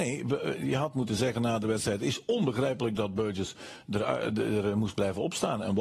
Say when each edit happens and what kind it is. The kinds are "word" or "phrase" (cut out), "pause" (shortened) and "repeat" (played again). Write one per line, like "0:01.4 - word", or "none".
none